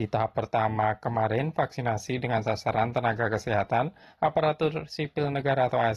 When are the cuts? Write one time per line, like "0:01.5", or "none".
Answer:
none